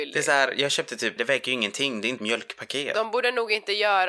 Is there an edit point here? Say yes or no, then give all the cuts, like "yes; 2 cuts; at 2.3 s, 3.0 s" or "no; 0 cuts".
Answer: yes; 2 cuts; at 1.2 s, 2.2 s